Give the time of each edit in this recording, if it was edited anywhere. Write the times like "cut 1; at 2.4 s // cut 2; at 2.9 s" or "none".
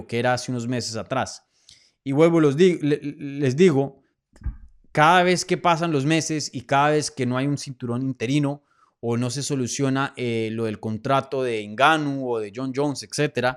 none